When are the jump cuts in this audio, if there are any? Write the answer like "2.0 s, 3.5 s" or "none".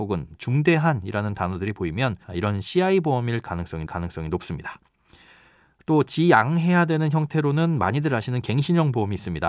2.2 s, 3.9 s